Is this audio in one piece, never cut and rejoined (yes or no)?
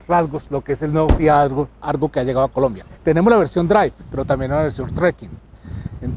no